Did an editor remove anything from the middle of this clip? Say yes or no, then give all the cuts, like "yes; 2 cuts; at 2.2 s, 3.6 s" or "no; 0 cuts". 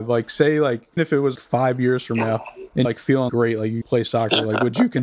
yes; 5 cuts; at 1.0 s, 1.3 s, 2.8 s, 3.3 s, 3.8 s